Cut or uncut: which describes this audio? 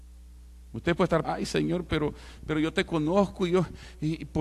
cut